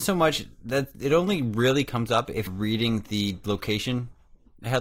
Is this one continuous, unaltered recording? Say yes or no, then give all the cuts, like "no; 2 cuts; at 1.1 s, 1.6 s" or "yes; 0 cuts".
no; 1 cut; at 2.5 s